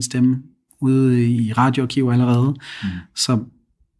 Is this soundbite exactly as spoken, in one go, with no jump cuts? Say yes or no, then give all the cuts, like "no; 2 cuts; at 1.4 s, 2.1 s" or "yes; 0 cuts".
yes; 0 cuts